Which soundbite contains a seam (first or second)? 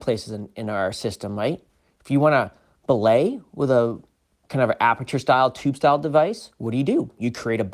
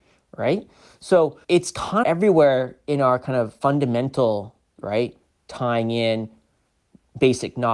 second